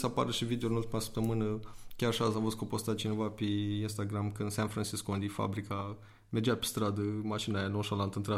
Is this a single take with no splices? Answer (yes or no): yes